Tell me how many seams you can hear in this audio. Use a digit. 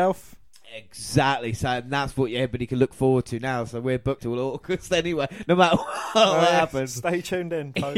1